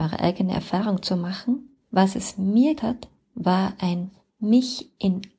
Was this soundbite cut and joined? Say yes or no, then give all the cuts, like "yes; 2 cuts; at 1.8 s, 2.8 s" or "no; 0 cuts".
yes; 3 cuts; at 1.8 s, 2.8 s, 4.2 s